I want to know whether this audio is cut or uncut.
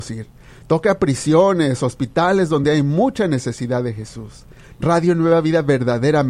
uncut